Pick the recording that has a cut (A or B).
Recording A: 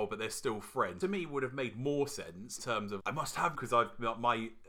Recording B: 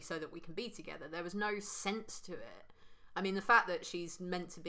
A